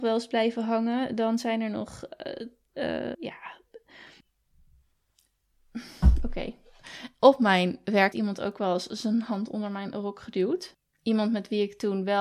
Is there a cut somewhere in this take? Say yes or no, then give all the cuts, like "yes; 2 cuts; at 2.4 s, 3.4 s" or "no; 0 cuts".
yes; 2 cuts; at 3.1 s, 8.1 s